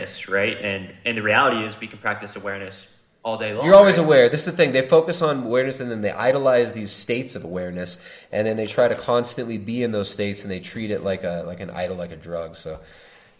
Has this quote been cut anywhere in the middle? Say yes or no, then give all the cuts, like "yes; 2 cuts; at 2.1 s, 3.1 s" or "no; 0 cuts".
no; 0 cuts